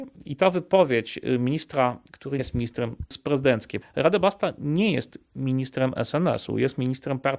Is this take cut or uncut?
cut